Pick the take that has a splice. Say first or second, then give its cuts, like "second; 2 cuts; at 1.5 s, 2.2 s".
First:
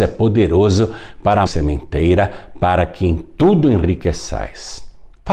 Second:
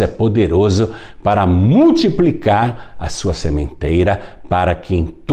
first; 1 cut; at 1.5 s